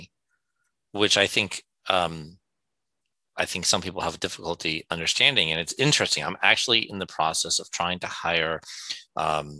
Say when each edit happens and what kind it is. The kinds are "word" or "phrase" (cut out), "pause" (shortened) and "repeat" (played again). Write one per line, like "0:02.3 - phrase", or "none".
none